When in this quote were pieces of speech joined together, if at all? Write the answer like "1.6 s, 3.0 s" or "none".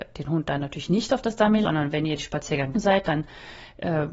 1.6 s, 2.7 s